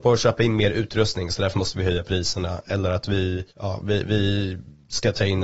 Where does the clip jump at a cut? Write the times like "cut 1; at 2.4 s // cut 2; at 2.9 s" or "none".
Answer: cut 1; at 3.5 s